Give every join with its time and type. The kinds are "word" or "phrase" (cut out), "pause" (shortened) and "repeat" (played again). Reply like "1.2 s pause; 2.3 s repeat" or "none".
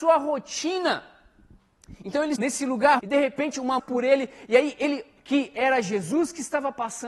2.4 s word; 3.0 s word; 3.8 s phrase; 5.2 s word

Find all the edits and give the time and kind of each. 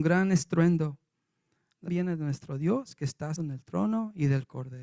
1.9 s word; 3.4 s word

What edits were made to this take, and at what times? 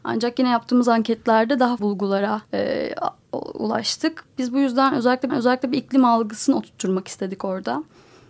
1.8 s word; 2.4 s pause; 5.3 s repeat

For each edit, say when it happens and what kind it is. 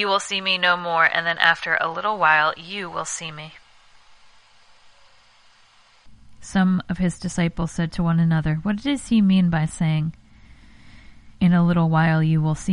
11.3 s pause

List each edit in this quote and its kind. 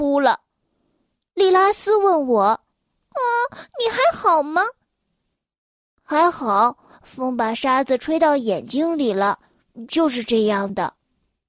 none

